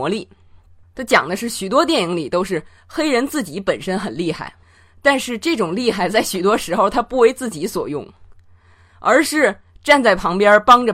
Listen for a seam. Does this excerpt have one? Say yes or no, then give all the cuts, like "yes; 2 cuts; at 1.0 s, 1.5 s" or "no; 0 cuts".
no; 0 cuts